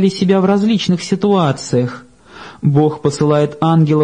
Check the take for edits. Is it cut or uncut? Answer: uncut